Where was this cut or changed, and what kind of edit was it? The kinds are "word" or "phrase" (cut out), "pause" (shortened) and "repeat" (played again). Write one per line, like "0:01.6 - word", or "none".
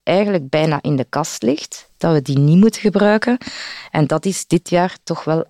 none